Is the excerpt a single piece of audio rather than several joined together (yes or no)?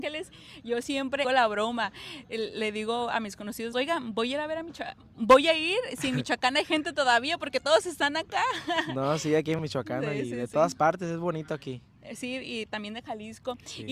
no